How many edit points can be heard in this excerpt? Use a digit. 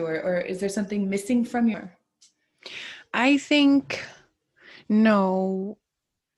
1